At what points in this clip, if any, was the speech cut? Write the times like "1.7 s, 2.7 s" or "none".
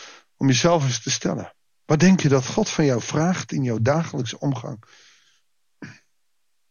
none